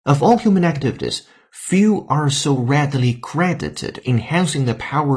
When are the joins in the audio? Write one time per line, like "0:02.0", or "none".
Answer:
0:04.0